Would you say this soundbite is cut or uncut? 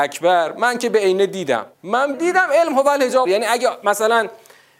cut